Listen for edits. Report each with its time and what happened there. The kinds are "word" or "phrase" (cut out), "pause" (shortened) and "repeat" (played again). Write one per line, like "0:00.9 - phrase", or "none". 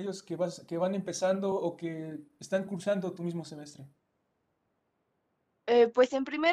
none